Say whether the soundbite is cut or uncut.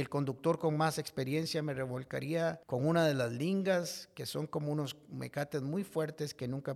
cut